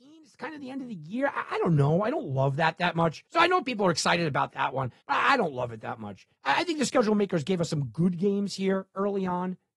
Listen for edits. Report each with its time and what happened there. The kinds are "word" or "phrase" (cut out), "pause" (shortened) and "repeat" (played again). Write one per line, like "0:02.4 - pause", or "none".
0:03.3 - pause
0:05.0 - pause
0:06.3 - pause